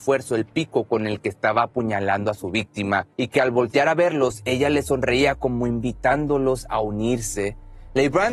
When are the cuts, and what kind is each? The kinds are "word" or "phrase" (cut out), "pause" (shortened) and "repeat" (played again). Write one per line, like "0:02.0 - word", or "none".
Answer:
0:03.1 - pause